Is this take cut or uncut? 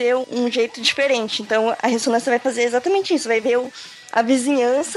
uncut